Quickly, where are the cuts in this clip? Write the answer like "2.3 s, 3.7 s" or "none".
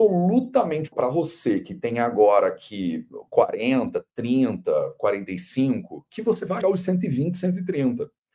0.9 s, 6.6 s